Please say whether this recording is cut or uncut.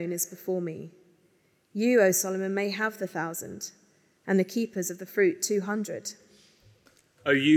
uncut